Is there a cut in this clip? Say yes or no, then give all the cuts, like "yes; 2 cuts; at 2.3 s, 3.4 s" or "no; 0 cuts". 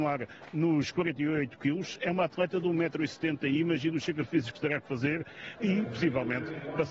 no; 0 cuts